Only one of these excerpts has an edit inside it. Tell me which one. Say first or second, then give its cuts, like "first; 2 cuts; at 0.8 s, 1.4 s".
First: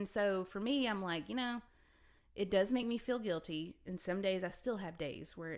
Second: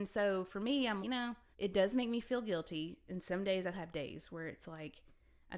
second; 3 cuts; at 1.0 s, 1.5 s, 3.7 s